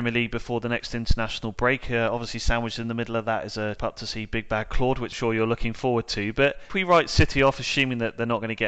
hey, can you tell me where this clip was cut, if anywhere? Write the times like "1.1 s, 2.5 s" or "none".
3.8 s, 5.1 s, 6.7 s